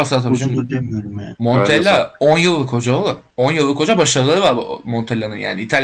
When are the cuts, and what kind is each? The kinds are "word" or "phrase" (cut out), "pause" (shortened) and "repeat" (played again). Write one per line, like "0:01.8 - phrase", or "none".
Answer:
0:03.3 - pause